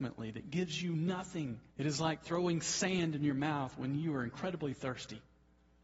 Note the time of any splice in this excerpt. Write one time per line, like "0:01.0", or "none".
0:01.7